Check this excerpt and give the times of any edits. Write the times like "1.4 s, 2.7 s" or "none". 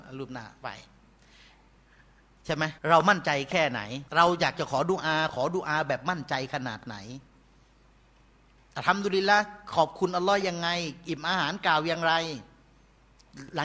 2.8 s, 4.1 s